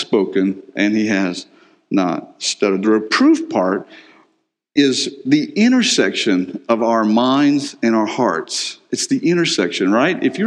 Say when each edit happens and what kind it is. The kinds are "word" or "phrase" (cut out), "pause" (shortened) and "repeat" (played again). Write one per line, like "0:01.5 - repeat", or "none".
none